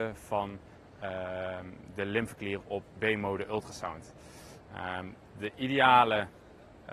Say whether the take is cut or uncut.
uncut